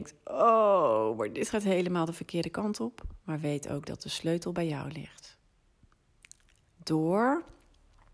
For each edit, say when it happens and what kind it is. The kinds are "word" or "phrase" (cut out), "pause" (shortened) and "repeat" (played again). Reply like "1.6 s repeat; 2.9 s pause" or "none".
none